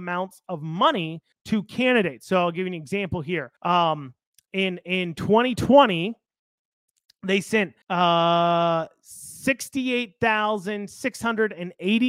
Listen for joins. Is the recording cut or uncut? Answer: cut